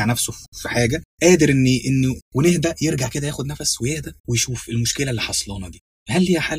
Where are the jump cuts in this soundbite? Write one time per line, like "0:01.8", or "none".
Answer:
0:01.1
0:02.2
0:04.2